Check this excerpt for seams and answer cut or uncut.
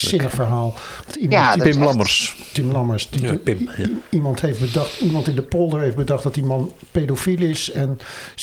uncut